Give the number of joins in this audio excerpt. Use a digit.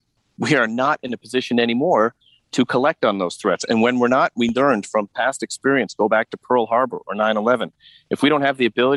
0